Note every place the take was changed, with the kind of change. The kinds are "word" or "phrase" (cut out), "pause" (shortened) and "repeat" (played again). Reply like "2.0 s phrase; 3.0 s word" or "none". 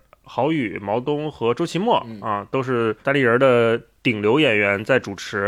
3.0 s pause